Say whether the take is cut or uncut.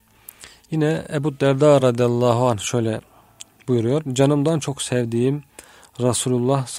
uncut